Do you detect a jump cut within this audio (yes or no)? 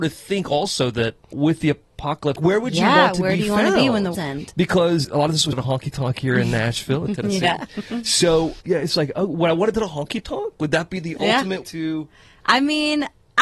yes